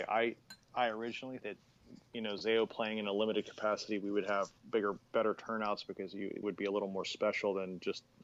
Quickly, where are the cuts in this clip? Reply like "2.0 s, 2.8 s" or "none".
1.4 s, 2.1 s, 4.6 s, 6.4 s